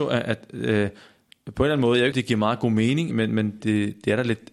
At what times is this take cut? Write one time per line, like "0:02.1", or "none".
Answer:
0:02.1
0:03.1
0:03.6